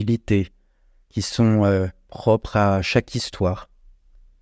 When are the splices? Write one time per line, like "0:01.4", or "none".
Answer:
none